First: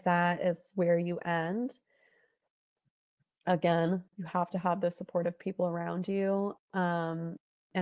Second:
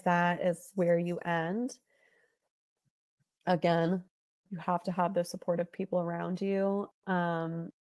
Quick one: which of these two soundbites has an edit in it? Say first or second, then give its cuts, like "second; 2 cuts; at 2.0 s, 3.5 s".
first; 1 cut; at 4.1 s